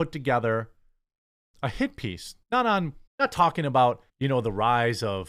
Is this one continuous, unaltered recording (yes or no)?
no